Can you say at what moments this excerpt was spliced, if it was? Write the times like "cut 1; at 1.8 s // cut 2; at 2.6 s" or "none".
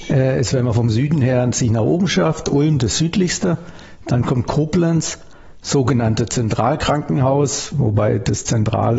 none

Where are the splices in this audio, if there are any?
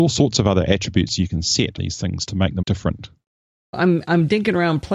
cut 1; at 1.8 s // cut 2; at 2.3 s // cut 3; at 2.6 s // cut 4; at 3.7 s

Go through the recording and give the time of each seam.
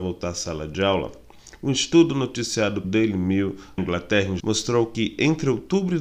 cut 1; at 2.8 s // cut 2; at 3.8 s // cut 3; at 4.4 s

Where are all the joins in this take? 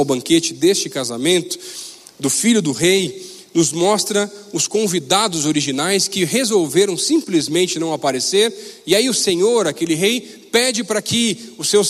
none

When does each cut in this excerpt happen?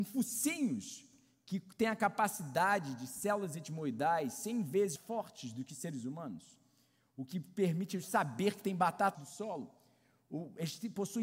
cut 1; at 5.0 s // cut 2; at 9.1 s

